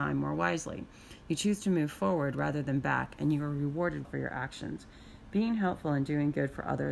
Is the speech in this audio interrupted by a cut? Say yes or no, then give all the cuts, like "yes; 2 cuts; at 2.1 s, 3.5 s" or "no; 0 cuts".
yes; 1 cut; at 4.0 s